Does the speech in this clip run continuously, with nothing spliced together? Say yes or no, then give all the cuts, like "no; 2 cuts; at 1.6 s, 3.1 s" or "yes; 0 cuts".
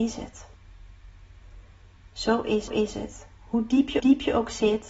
no; 2 cuts; at 2.7 s, 4.0 s